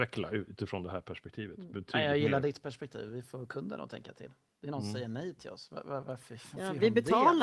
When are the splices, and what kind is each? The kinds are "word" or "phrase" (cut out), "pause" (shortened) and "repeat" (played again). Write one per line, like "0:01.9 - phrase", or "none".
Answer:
none